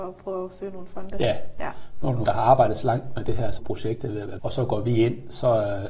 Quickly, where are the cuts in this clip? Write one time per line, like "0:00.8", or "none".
0:02.3
0:03.6
0:04.4

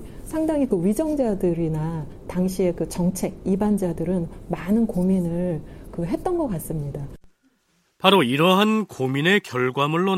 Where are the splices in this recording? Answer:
none

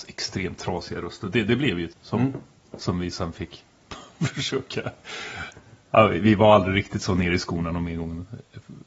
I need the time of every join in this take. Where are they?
0:01.9
0:02.6

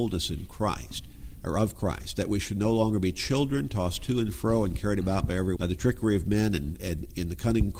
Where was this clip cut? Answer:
0:05.6

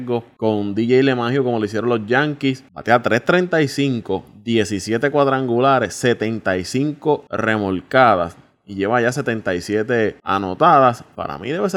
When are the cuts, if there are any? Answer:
none

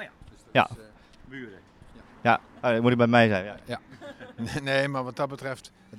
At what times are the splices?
none

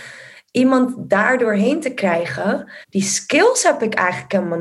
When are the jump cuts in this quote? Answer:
0:02.8

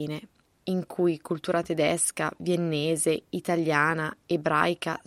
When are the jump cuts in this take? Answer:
none

